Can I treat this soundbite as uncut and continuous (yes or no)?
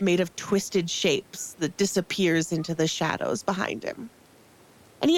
yes